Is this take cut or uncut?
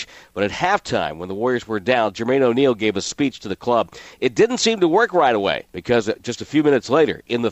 cut